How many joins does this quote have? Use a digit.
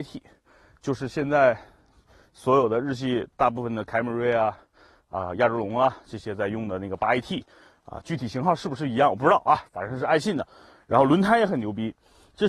0